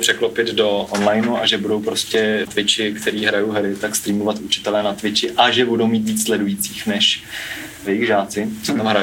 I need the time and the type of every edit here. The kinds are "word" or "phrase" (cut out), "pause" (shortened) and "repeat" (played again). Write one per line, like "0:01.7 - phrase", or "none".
0:02.5 - phrase